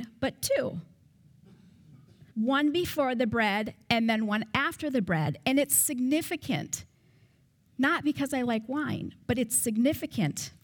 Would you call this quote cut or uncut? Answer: cut